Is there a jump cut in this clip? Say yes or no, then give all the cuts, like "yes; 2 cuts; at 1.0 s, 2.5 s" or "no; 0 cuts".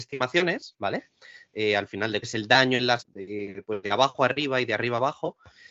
yes; 3 cuts; at 2.2 s, 3.0 s, 3.8 s